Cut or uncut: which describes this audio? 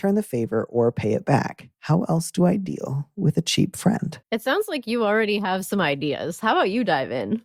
cut